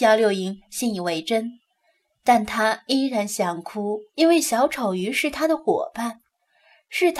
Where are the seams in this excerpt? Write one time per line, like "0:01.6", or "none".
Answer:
0:04.1